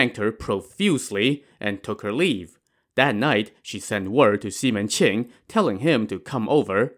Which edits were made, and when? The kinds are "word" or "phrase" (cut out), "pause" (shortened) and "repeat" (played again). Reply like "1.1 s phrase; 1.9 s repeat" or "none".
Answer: none